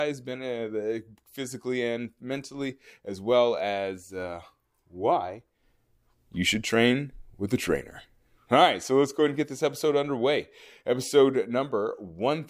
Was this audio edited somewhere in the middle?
no; 0 cuts

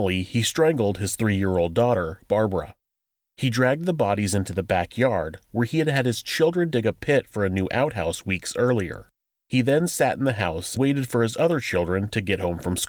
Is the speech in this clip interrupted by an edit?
yes; 1 cut; at 10.8 s

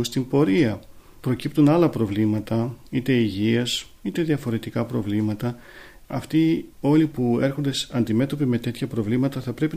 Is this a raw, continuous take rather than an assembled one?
no; 1 cut; at 6.7 s

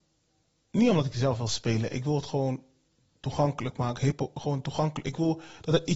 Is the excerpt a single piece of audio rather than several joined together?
yes; 0 cuts

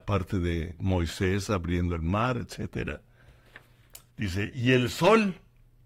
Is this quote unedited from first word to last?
no; 1 cut; at 4.1 s

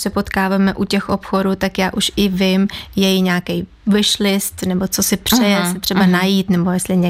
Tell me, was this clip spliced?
no; 0 cuts

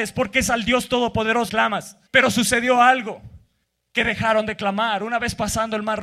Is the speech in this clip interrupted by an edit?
yes; 3 cuts; at 1.5 s, 2.1 s, 3.6 s

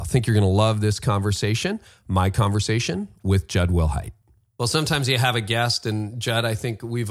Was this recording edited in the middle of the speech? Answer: no; 0 cuts

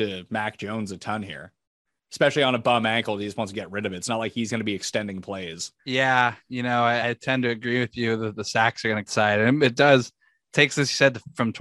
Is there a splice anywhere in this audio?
yes; 3 cuts; at 5.8 s, 7.0 s, 9.1 s

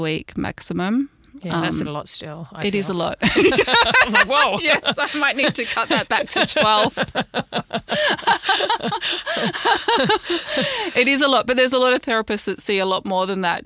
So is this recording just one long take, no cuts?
no; 1 cut; at 1.8 s

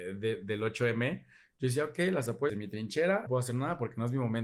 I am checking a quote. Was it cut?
yes; 2 cuts; at 2.5 s, 3.3 s

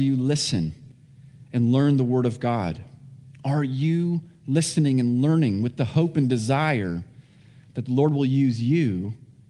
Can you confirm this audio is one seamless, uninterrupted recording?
yes; 0 cuts

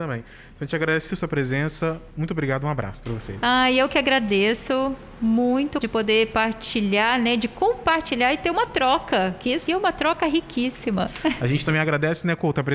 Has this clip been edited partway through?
yes; 3 cuts; at 1.1 s, 5.8 s, 9.7 s

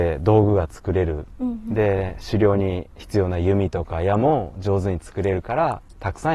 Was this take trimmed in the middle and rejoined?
yes; 1 cut; at 2.9 s

